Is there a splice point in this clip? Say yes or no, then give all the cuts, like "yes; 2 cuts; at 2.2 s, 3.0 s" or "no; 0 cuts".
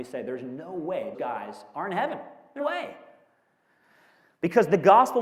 yes; 2 cuts; at 1.1 s, 2.6 s